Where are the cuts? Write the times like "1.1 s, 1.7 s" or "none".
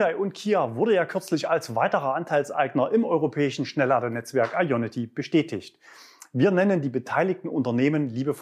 none